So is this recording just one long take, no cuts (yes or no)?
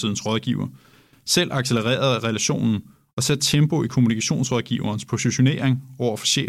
yes